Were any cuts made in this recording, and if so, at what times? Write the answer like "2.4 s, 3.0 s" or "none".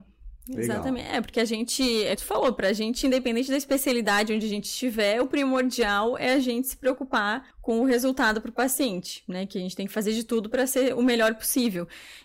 2.2 s, 7.5 s

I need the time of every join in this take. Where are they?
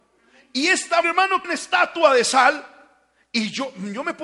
1.0 s, 1.4 s

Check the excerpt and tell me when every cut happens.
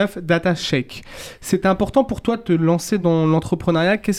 none

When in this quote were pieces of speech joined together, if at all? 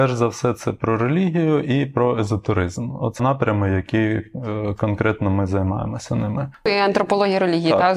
3.2 s

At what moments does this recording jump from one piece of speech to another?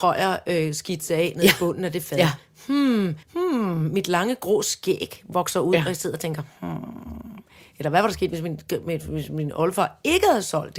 3.2 s

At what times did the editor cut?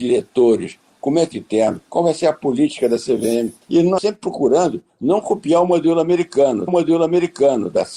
1.3 s, 1.8 s, 3.6 s, 4.0 s, 6.7 s

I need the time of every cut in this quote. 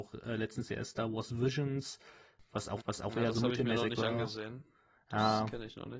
2.8 s

